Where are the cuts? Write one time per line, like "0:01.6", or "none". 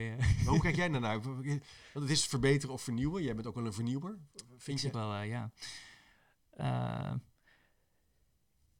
0:04.9